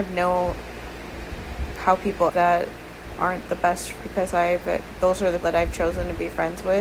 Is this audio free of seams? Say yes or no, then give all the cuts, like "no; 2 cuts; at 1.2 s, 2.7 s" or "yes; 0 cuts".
no; 4 cuts; at 1.8 s, 2.3 s, 4.0 s, 5.4 s